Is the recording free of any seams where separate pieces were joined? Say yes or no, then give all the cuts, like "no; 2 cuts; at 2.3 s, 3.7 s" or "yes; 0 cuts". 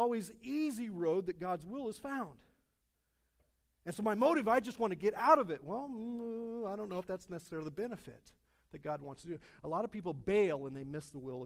yes; 0 cuts